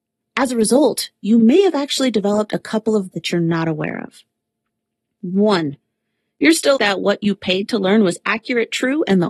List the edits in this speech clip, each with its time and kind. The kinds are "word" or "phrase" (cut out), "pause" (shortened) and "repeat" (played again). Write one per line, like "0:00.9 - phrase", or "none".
0:03.1 - word
0:06.8 - word